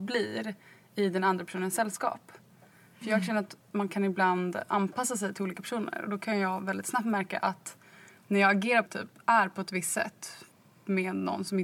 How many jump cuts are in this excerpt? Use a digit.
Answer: 1